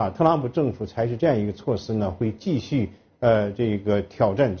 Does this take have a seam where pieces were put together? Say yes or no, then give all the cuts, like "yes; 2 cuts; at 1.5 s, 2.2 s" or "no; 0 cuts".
no; 0 cuts